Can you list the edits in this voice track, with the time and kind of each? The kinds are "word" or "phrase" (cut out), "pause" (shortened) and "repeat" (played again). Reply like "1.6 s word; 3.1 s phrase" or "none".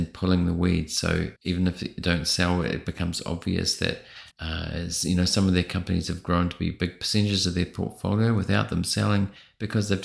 1.4 s pause; 4.3 s pause